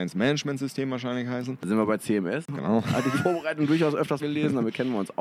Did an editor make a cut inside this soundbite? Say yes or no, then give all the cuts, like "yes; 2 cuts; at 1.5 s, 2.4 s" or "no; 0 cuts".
yes; 2 cuts; at 3.1 s, 4.2 s